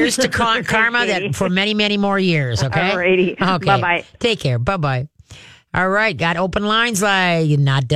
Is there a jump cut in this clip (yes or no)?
no